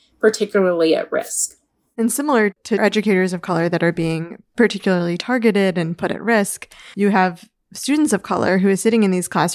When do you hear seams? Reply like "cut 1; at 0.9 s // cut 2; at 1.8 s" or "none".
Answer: none